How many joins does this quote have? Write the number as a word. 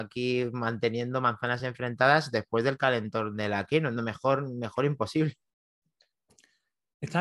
zero